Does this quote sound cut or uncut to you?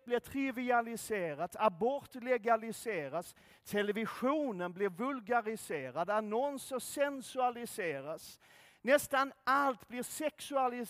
uncut